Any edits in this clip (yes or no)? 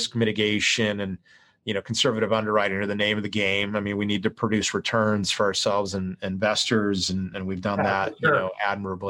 no